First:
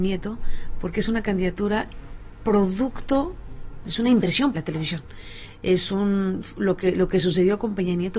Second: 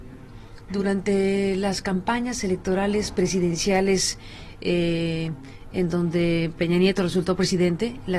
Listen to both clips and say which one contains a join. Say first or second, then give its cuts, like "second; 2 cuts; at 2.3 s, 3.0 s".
first; 2 cuts; at 3.8 s, 4.5 s